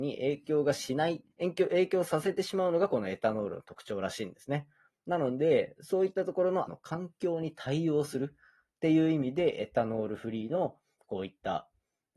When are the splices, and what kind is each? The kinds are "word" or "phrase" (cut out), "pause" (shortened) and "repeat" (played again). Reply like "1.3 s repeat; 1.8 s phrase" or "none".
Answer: 1.3 s pause; 6.7 s word